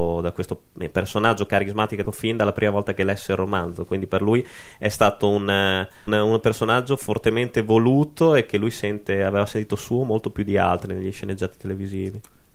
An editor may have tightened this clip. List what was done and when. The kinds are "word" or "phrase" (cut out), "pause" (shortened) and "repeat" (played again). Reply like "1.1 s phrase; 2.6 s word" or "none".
2.0 s word; 6.1 s word